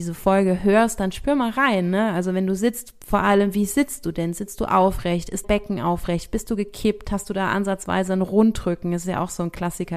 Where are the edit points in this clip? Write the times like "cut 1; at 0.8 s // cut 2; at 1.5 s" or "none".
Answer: cut 1; at 5.4 s